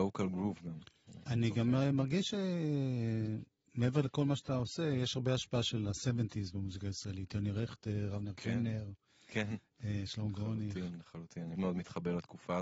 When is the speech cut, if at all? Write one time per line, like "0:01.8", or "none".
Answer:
0:11.6